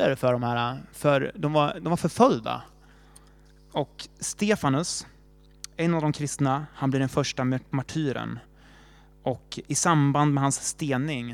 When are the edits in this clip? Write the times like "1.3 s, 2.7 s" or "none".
none